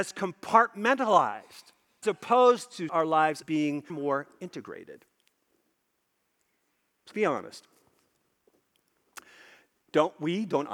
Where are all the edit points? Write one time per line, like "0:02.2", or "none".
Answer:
0:02.0
0:02.9
0:03.4
0:03.9
0:07.1